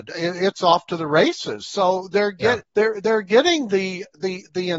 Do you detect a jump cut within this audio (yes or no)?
yes